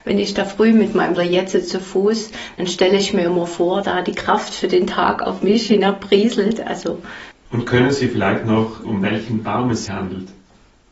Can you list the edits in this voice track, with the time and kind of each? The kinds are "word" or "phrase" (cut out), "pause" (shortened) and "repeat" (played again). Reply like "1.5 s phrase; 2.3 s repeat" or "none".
1.2 s phrase; 3.8 s word; 7.4 s pause; 8.8 s word; 9.9 s word